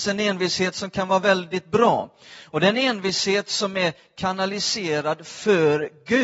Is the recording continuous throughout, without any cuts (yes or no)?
yes